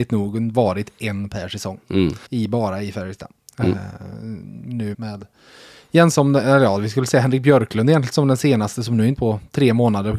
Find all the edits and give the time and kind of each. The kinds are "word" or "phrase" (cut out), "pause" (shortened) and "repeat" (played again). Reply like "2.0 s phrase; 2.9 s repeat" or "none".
2.3 s pause; 4.9 s word; 6.1 s word; 9.2 s phrase